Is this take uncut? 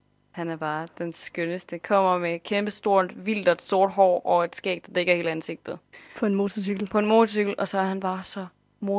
yes; 0 cuts

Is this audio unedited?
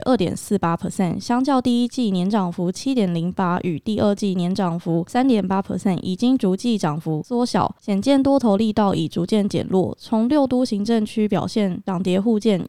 yes; 0 cuts

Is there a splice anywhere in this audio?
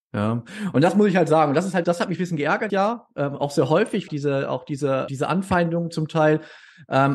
yes; 4 cuts; at 1.8 s, 2.7 s, 4.1 s, 5.1 s

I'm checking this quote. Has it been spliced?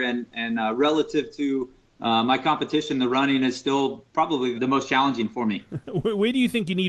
yes; 1 cut; at 4.5 s

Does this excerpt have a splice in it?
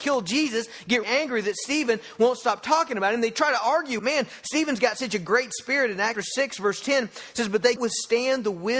yes; 4 cuts; at 1.0 s, 4.0 s, 6.1 s, 7.8 s

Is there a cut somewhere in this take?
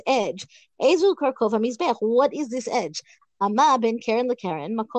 no; 0 cuts

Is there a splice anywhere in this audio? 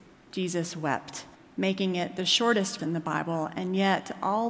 yes; 2 cuts; at 1.3 s, 2.8 s

